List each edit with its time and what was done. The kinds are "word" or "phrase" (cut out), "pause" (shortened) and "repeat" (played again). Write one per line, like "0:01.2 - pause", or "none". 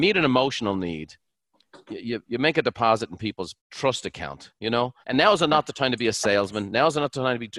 0:03.6 - pause
0:05.0 - pause